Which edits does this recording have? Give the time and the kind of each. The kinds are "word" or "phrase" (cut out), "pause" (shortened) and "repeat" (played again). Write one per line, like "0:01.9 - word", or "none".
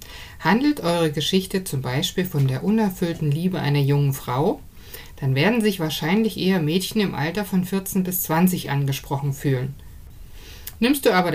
none